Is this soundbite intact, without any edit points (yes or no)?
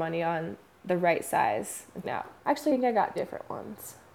no